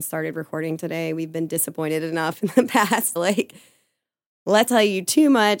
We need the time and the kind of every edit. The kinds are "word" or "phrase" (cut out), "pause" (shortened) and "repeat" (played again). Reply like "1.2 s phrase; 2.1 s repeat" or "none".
3.2 s phrase; 4.7 s word